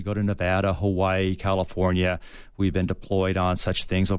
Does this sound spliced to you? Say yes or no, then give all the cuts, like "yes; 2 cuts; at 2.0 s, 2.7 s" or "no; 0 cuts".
no; 0 cuts